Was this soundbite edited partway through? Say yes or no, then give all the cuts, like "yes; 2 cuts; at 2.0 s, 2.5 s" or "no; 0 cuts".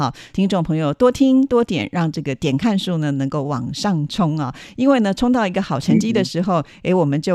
no; 0 cuts